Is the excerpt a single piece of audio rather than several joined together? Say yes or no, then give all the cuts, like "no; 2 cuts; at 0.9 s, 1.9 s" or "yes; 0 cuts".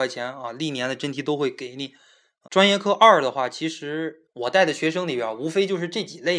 no; 2 cuts; at 2.4 s, 4.3 s